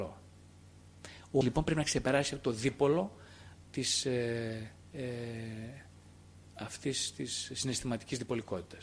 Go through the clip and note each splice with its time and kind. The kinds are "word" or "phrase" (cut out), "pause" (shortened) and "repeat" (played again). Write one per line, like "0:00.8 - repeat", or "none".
0:01.4 - word
0:03.6 - word
0:04.8 - pause